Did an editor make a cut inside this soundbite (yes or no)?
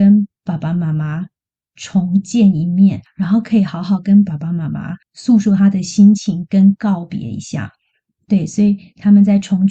yes